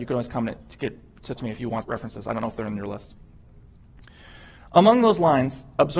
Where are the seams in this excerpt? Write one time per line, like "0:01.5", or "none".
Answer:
0:01.4
0:01.8

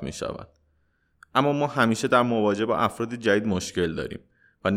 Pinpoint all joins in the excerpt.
none

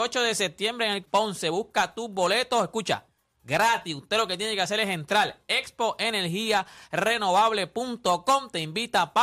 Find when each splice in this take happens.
0:01.1

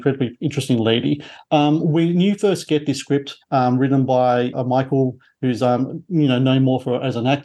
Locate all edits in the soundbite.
0:03.4
0:04.5

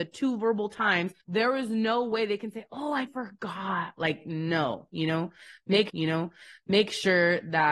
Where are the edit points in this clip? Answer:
0:01.2
0:03.1
0:05.9

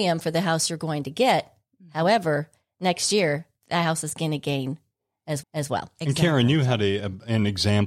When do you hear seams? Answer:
0:05.4

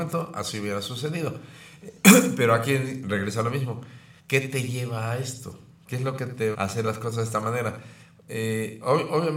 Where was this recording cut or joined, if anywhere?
0:04.2
0:06.5

